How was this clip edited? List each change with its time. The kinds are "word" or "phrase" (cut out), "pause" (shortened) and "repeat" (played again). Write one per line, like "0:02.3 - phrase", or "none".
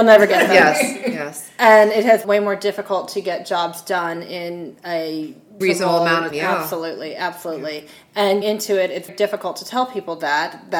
0:02.2 - word
0:05.6 - word
0:06.3 - word
0:08.4 - word
0:09.1 - word